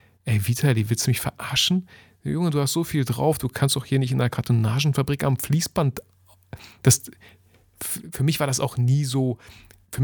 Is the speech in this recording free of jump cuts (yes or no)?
yes